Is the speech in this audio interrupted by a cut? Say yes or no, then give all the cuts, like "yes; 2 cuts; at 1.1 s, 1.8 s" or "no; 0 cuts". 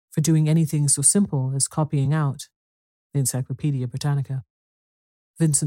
no; 0 cuts